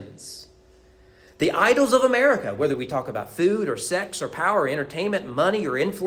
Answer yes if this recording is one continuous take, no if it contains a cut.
yes